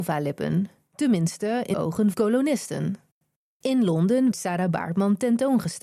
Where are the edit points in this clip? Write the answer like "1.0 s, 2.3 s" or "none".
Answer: 1.7 s, 2.1 s, 4.3 s